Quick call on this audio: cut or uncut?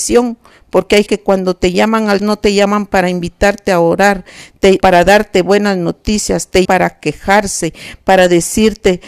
cut